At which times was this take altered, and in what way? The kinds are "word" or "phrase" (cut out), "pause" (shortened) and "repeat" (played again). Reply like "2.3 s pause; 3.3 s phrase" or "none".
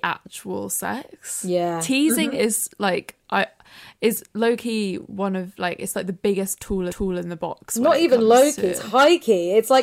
6.9 s repeat